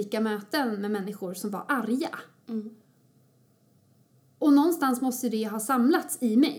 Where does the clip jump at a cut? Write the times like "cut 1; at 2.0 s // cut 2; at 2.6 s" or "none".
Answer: none